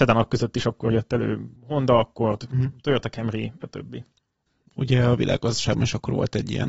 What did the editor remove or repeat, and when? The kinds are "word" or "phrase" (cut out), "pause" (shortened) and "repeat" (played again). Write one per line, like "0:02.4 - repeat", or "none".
0:01.6 - pause
0:03.6 - word